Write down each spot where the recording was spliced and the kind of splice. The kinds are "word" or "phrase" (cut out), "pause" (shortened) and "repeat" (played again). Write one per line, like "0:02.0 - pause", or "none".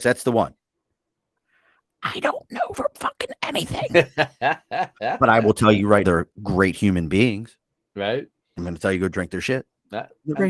0:02.7 - word
0:06.0 - word
0:08.6 - word